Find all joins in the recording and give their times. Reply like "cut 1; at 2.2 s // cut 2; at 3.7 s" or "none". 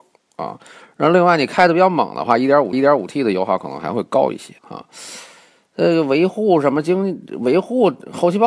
cut 1; at 2.7 s // cut 2; at 4.6 s